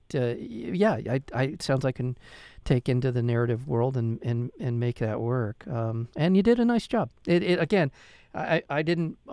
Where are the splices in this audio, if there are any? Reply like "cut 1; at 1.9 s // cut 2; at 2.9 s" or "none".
cut 1; at 1.9 s // cut 2; at 6.1 s